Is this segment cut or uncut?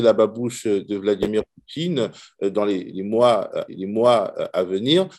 cut